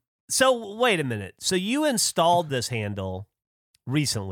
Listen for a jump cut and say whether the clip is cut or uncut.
uncut